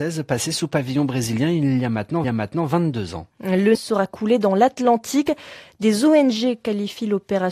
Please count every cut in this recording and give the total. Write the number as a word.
two